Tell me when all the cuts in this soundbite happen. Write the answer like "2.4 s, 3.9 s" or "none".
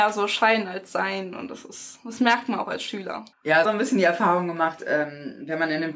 3.3 s, 3.6 s

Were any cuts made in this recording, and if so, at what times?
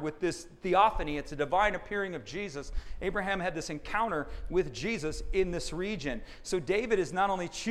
none

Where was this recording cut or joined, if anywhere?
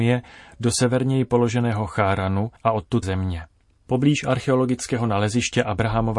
2.6 s, 3.0 s

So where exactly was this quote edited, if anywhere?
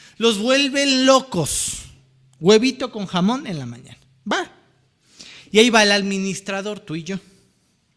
none

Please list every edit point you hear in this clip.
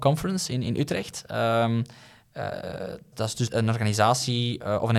3.1 s, 3.5 s

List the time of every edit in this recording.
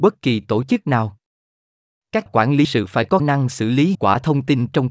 2.3 s, 2.6 s, 3.2 s, 3.9 s

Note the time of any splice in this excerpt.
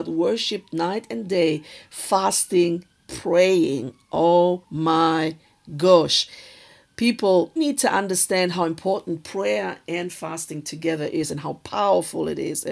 3.0 s, 4.6 s, 7.6 s

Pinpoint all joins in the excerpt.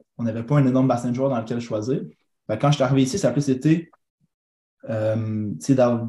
none

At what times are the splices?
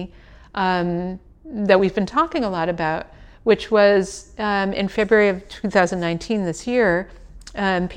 none

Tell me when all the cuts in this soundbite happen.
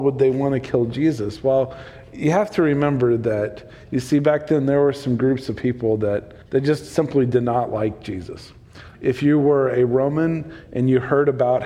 6.4 s, 8.9 s

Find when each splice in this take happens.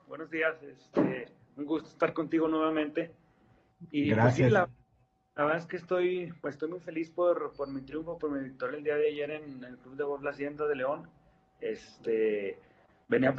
none

